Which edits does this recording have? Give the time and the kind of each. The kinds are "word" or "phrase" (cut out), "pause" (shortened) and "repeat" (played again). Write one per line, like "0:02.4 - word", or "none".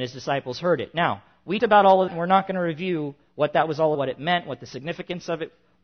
0:01.6 - word
0:02.1 - word
0:03.9 - word